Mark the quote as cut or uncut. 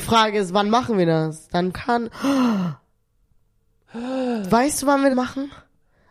cut